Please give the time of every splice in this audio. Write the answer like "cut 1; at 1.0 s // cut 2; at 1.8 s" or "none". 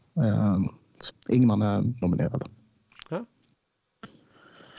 cut 1; at 1.1 s // cut 2; at 2.0 s